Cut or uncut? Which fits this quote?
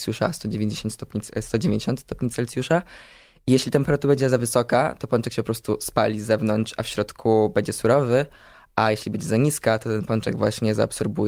uncut